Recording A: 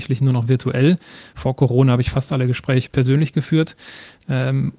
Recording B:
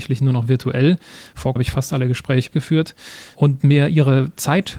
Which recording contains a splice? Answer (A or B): B